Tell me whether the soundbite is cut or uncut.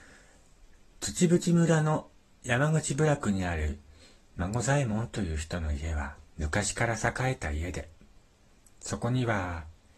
cut